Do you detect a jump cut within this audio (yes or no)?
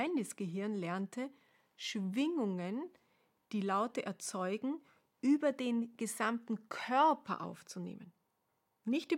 no